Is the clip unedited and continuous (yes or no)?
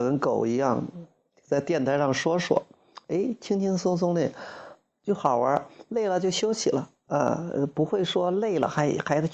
yes